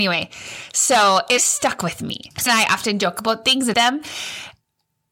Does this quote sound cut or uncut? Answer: cut